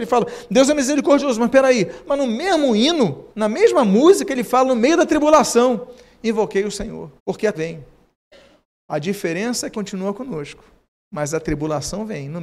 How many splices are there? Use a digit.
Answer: 4